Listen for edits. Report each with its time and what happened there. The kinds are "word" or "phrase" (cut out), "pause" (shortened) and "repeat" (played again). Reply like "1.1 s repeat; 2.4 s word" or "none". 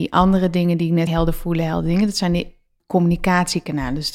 1.1 s word; 2.8 s word